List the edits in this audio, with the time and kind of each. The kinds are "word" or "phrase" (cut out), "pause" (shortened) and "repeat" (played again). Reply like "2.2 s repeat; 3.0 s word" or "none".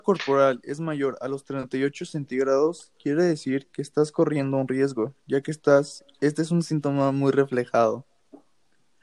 none